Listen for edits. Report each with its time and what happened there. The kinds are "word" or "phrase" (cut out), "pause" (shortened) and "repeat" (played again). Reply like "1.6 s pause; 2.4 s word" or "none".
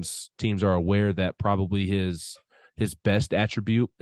none